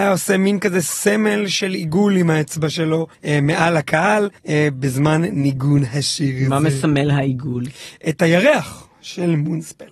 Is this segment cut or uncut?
cut